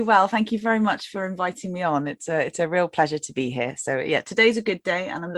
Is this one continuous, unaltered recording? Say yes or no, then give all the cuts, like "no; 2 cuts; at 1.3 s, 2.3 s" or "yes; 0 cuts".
yes; 0 cuts